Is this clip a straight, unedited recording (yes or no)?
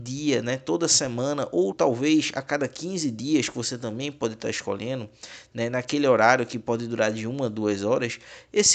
no